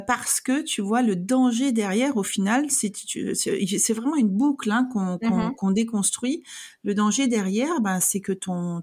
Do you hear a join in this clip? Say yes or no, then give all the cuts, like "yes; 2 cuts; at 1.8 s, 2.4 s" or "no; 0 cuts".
no; 0 cuts